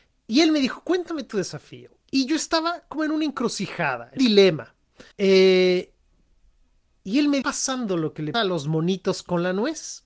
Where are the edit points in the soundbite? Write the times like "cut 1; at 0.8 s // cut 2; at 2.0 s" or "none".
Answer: cut 1; at 2.0 s // cut 2; at 4.2 s // cut 3; at 5.1 s // cut 4; at 7.4 s // cut 5; at 8.3 s